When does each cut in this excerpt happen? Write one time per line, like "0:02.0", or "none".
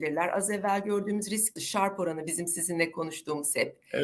0:01.6